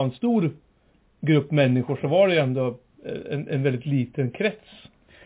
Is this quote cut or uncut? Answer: uncut